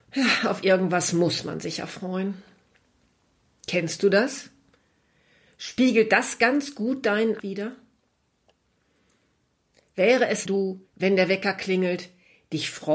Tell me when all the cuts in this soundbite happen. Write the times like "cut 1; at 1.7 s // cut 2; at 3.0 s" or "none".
cut 1; at 7.4 s // cut 2; at 10.5 s // cut 3; at 10.9 s